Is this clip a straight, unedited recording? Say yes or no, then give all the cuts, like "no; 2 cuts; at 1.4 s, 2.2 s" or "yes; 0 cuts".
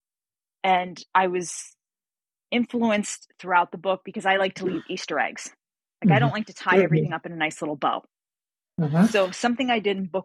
yes; 0 cuts